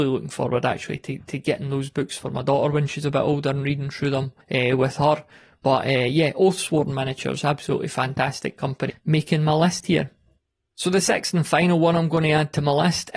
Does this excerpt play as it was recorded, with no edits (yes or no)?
no